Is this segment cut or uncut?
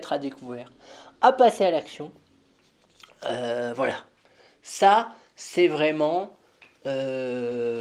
uncut